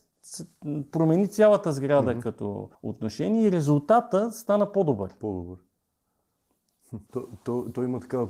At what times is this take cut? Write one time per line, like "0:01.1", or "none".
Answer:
0:02.7
0:07.1